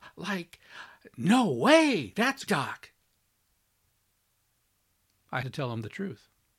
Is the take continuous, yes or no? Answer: no